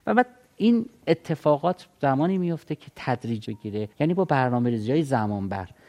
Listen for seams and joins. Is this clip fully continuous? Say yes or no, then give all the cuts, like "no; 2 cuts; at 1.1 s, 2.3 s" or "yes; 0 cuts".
no; 2 cuts; at 3.4 s, 3.9 s